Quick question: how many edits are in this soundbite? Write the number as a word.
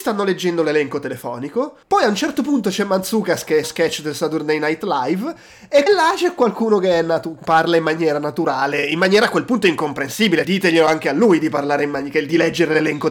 four